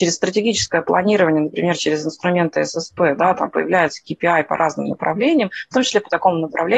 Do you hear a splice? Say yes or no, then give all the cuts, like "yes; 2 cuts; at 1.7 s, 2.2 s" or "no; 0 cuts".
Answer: no; 0 cuts